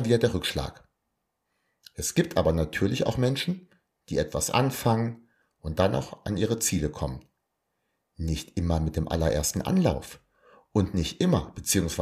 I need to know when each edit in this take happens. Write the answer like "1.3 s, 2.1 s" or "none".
none